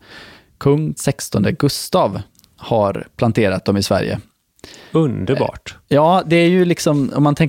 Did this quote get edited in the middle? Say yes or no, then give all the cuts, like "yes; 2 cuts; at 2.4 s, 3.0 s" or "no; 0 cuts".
yes; 2 cuts; at 1.0 s, 3.6 s